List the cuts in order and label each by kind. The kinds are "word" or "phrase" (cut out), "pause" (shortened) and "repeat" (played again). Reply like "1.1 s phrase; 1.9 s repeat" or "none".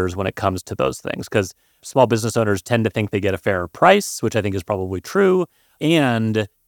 none